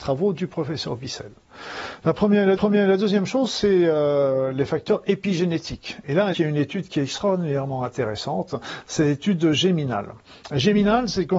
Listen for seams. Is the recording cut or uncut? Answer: cut